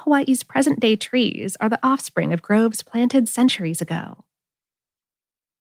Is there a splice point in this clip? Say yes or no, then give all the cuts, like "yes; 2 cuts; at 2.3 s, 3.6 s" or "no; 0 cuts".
no; 0 cuts